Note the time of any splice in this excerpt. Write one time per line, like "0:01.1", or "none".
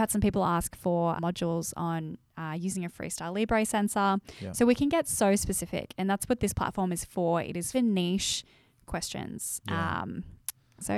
0:01.2
0:07.7